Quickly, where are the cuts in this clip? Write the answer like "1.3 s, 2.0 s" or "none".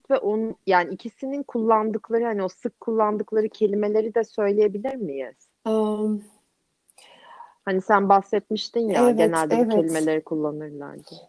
5.5 s